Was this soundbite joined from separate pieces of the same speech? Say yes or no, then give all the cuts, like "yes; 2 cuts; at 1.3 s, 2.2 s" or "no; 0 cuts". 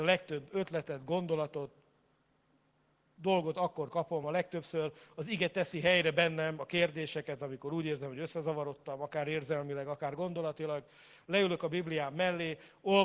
no; 0 cuts